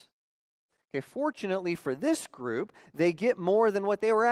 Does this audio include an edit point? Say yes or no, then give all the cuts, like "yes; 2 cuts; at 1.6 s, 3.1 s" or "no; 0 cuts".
no; 0 cuts